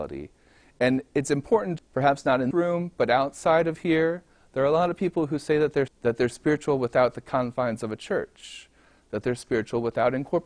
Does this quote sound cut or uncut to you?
cut